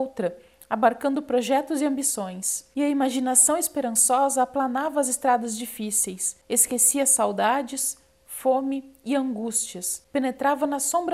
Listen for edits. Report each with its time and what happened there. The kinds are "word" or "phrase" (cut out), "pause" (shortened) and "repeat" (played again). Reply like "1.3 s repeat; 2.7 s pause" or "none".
none